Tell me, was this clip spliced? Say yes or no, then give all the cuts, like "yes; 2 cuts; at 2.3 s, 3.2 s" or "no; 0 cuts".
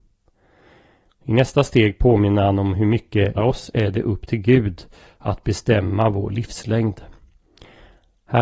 yes; 1 cut; at 3.4 s